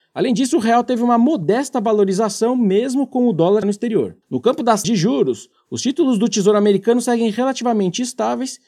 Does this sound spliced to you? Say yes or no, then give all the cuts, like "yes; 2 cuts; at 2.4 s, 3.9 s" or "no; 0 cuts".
yes; 3 cuts; at 3.6 s, 4.2 s, 4.8 s